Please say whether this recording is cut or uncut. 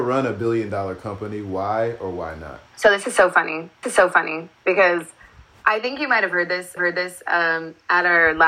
cut